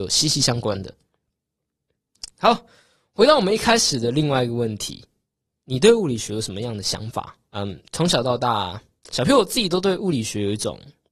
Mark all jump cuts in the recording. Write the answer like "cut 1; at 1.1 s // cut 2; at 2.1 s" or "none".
cut 1; at 7.4 s